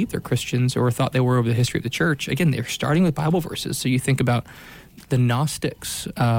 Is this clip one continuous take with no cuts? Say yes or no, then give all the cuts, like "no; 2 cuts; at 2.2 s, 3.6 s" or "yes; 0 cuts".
no; 1 cut; at 5.0 s